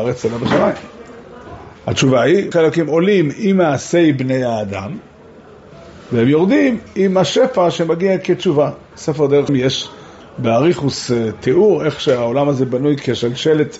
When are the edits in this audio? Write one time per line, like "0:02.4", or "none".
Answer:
0:02.5
0:09.5